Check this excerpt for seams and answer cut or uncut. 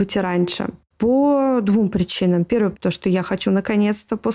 cut